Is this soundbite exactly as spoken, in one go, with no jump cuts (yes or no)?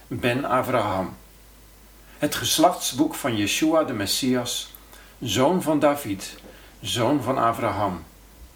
yes